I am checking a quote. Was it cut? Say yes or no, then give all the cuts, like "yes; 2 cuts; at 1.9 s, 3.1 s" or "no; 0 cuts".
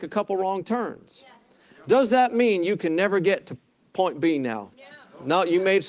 no; 0 cuts